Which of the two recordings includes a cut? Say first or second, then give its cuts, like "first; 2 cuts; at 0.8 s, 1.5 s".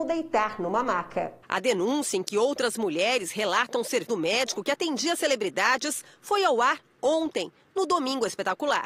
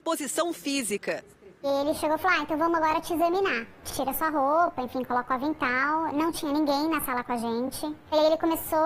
first; 2 cuts; at 1.4 s, 4.1 s